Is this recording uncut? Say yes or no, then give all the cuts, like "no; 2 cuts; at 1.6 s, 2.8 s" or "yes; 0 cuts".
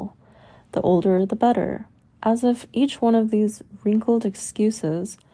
yes; 0 cuts